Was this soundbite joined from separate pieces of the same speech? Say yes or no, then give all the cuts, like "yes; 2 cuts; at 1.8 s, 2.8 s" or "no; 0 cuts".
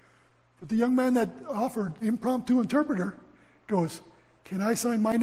no; 0 cuts